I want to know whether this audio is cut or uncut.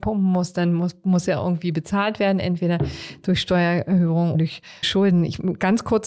cut